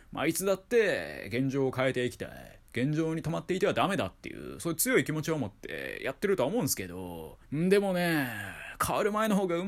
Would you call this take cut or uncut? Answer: cut